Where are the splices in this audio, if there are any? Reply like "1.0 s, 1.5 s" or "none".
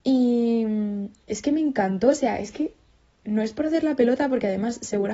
none